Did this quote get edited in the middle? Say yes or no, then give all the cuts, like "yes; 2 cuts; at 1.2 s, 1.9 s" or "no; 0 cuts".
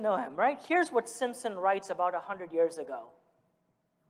no; 0 cuts